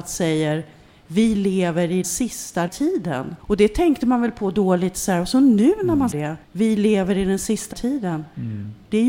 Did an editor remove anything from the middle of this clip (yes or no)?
yes